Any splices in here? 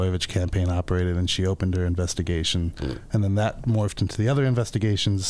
no; 0 cuts

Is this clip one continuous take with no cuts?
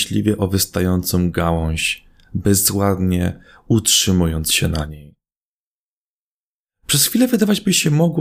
yes; 0 cuts

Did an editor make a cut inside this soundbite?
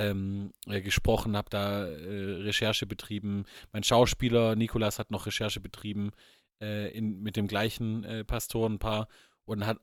no; 0 cuts

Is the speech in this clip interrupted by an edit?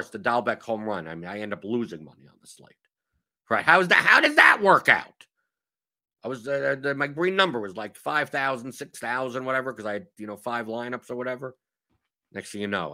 no; 0 cuts

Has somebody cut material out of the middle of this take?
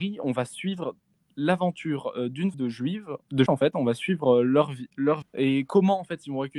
yes; 3 cuts; at 2.5 s, 3.5 s, 5.2 s

